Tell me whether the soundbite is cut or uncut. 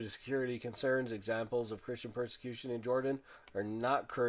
uncut